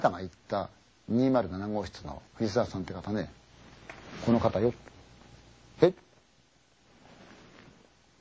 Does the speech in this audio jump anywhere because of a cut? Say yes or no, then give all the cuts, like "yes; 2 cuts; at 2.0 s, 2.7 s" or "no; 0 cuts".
yes; 2 cuts; at 0.9 s, 2.3 s